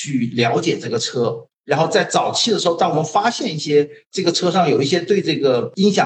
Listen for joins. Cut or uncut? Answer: cut